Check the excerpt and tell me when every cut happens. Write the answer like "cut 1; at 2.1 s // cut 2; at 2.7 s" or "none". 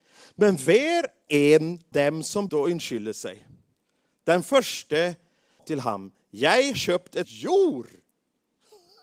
cut 1; at 1.3 s // cut 2; at 1.9 s // cut 3; at 2.5 s // cut 4; at 5.6 s // cut 5; at 6.7 s // cut 6; at 7.2 s